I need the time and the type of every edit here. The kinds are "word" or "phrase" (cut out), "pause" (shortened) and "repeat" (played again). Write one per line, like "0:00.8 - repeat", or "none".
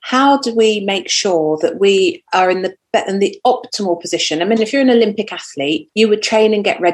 0:04.6 - word
0:05.9 - pause